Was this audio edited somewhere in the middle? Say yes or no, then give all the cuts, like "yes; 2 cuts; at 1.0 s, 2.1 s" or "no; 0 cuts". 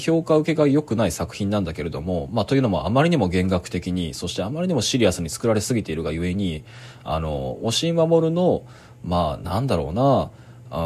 no; 0 cuts